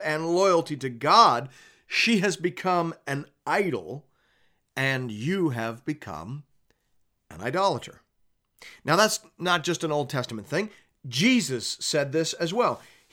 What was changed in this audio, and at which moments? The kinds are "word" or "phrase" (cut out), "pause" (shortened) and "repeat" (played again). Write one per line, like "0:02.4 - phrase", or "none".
none